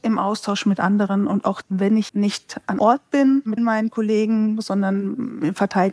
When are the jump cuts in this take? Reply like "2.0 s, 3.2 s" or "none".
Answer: 1.6 s, 2.1 s, 2.8 s, 3.6 s